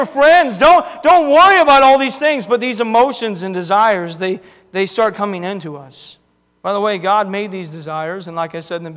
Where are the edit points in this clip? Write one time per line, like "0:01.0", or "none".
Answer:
0:06.5